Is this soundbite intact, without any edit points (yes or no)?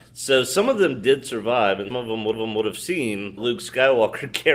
no